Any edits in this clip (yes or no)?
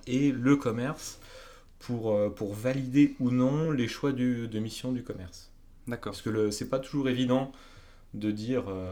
no